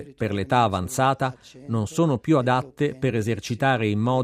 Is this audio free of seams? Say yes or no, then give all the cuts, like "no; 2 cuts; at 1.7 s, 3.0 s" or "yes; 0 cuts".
yes; 0 cuts